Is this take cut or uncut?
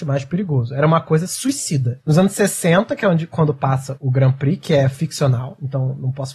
uncut